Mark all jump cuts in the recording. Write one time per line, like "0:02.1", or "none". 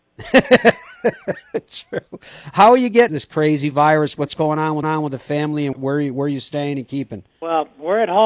0:03.1
0:04.8
0:05.7